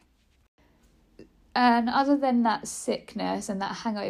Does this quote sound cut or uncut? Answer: uncut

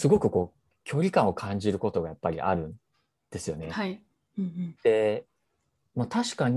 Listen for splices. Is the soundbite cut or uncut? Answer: uncut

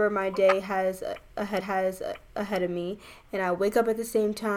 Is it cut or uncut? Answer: cut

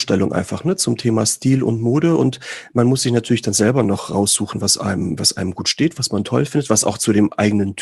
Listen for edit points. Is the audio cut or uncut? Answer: uncut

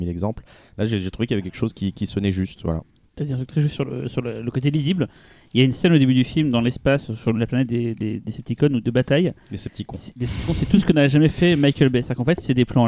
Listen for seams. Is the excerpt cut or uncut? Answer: uncut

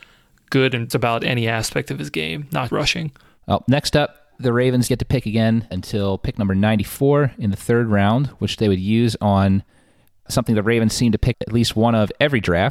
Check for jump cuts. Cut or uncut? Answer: cut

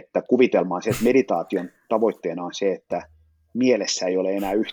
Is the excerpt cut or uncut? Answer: uncut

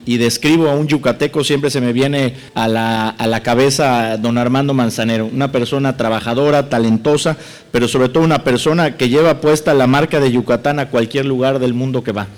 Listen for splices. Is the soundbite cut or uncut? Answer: cut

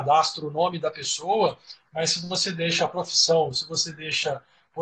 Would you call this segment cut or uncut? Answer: uncut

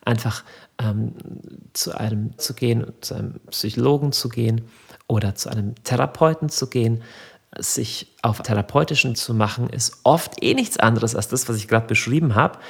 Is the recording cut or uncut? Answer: cut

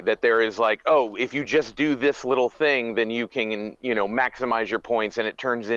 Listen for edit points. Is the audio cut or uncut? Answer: uncut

